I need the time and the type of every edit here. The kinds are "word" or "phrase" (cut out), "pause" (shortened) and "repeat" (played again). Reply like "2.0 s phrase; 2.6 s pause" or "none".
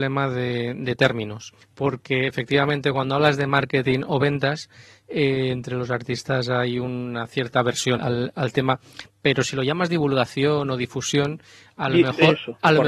1.6 s pause; 8.0 s word